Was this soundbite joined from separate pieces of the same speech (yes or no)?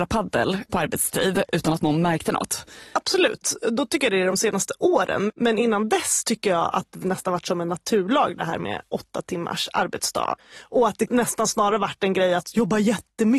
no